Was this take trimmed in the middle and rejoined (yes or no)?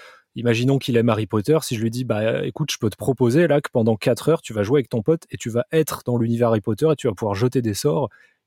no